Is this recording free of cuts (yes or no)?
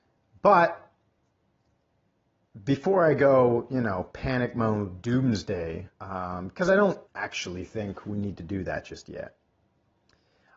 no